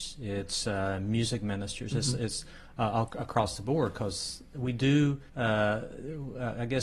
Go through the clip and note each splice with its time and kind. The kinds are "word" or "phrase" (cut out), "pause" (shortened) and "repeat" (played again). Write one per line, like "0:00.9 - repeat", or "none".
0:05.3 - pause